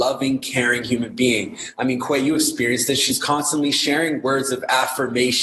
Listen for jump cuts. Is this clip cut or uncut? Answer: uncut